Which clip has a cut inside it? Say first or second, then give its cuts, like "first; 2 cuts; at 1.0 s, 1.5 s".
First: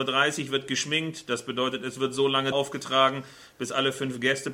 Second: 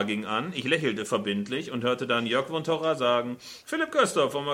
first; 1 cut; at 2.5 s